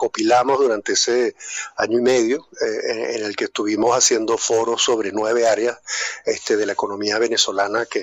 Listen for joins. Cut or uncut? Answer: uncut